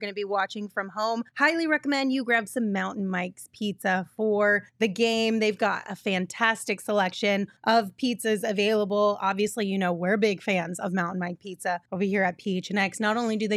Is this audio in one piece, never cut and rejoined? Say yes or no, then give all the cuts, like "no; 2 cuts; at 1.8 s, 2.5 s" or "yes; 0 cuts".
no; 4 cuts; at 1.3 s, 4.7 s, 7.6 s, 11.9 s